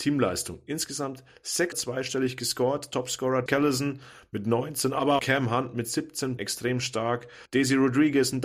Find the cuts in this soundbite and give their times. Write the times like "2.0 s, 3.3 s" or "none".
1.7 s, 3.5 s, 5.2 s, 6.4 s, 7.5 s

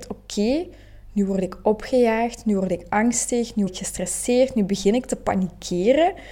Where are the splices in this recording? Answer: 3.7 s

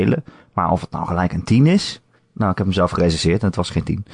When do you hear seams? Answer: 2.2 s

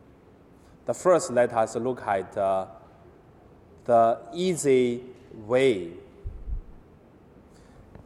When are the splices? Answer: none

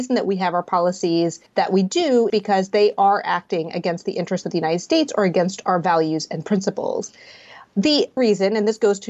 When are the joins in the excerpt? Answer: 1.5 s, 2.3 s, 8.2 s

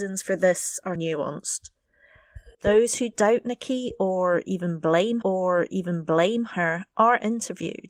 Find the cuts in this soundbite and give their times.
1.0 s, 2.5 s, 5.2 s

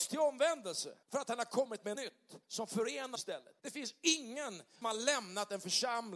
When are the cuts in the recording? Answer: 1.0 s, 1.9 s, 2.4 s, 3.1 s, 3.6 s, 4.8 s

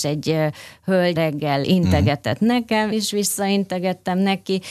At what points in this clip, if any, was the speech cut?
1.1 s, 1.6 s, 2.9 s

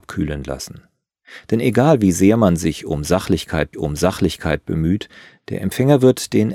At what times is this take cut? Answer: 3.7 s

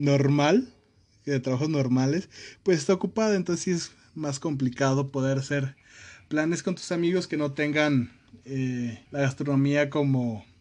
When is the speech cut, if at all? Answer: 9.1 s

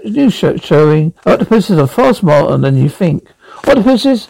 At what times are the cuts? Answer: 1.2 s

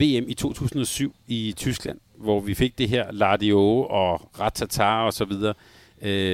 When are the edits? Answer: none

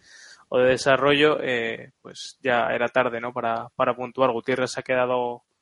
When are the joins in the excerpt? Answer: none

